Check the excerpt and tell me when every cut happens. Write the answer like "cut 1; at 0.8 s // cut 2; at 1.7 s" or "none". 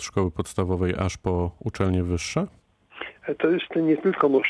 none